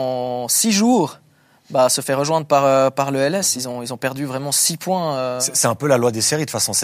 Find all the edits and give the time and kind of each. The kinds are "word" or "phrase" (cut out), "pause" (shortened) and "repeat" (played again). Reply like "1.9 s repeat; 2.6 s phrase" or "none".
none